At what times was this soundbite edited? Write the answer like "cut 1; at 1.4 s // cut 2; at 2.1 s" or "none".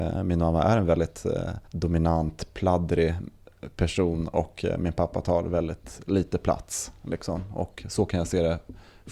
cut 1; at 1.7 s